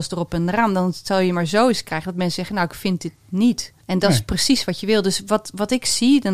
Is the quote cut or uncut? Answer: cut